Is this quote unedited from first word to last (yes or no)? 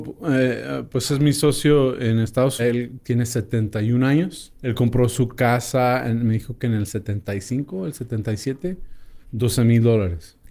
no